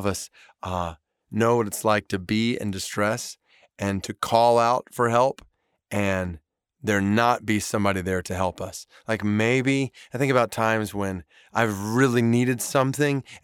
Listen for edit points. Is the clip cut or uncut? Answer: uncut